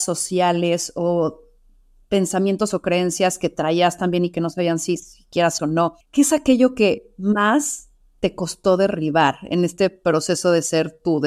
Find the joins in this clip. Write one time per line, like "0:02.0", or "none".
0:05.6
0:06.0